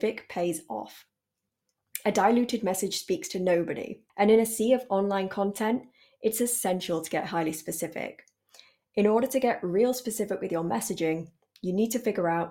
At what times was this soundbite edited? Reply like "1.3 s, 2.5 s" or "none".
4.1 s

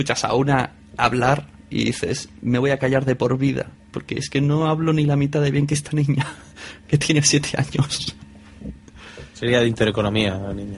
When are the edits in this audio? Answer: 3.8 s, 9.3 s

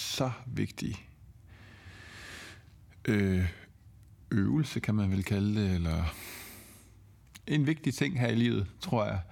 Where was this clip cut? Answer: none

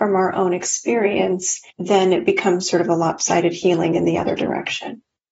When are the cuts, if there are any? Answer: 1.7 s

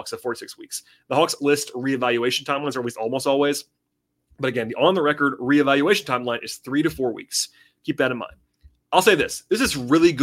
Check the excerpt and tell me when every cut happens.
1.4 s

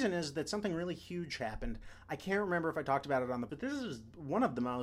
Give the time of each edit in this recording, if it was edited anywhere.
3.5 s

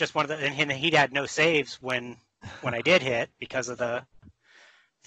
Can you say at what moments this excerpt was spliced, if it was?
none

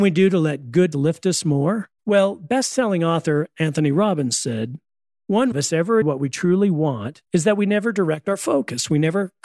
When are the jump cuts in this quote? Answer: 0.9 s, 2.0 s, 5.5 s, 6.0 s, 7.3 s

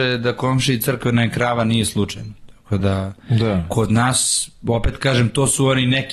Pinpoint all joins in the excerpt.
none

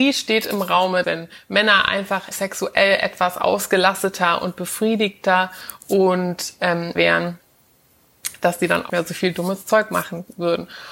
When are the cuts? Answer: 1.0 s, 2.3 s, 7.0 s, 8.9 s

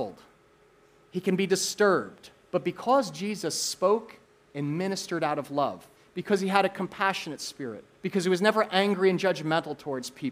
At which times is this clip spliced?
2.4 s, 4.2 s, 6.0 s, 7.9 s

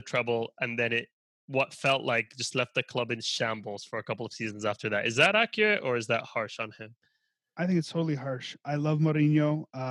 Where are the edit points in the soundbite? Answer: none

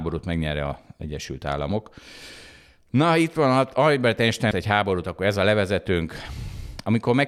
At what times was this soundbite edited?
4.5 s

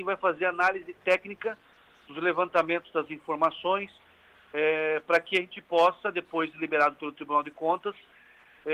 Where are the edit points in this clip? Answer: none

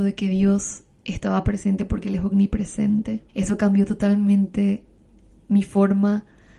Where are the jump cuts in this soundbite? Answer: 3.3 s

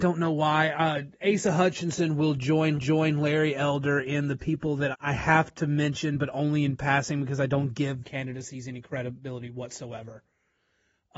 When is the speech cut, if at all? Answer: 2.8 s, 4.9 s, 8.0 s

